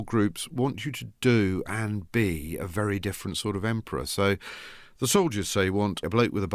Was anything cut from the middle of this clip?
yes; 1 cut; at 1.2 s

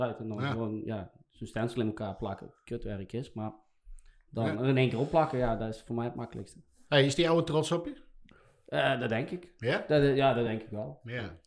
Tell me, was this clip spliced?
no; 0 cuts

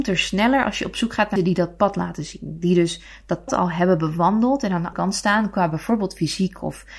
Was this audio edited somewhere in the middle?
yes; 3 cuts; at 1.4 s, 3.5 s, 4.9 s

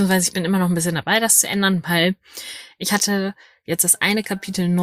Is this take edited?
no; 0 cuts

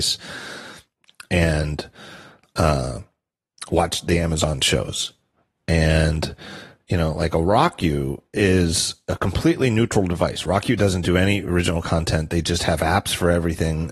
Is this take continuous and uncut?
yes; 0 cuts

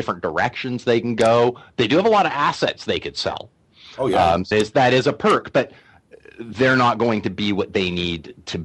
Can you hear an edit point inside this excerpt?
yes; 1 cut; at 4.5 s

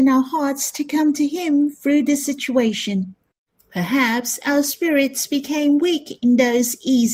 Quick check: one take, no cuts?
yes; 0 cuts

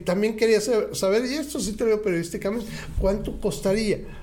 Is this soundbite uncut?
yes; 0 cuts

